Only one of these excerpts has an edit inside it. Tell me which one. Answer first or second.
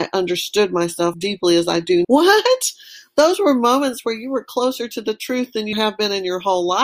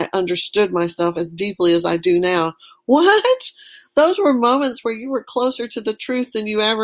first